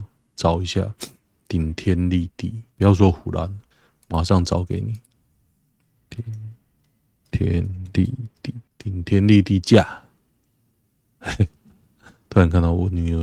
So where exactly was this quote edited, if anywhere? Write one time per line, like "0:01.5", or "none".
0:02.7
0:03.7
0:08.7